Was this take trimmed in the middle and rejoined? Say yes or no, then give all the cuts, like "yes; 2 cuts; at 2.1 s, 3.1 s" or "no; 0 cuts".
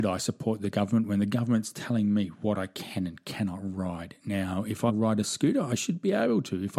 yes; 1 cut; at 4.9 s